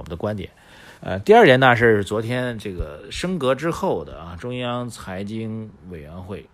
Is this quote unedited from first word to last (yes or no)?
no